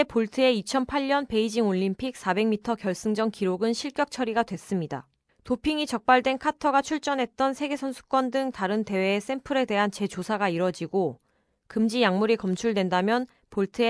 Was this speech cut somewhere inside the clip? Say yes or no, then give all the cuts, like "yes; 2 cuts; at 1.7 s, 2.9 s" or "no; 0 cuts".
no; 0 cuts